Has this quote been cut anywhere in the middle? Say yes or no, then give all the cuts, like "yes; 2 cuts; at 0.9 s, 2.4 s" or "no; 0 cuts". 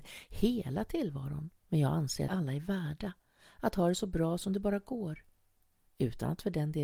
yes; 2 cuts; at 1.6 s, 2.3 s